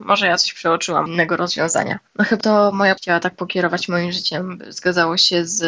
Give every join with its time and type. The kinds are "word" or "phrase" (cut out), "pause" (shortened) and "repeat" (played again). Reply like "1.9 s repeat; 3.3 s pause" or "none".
1.1 s phrase; 2.1 s pause; 2.4 s word; 3.0 s word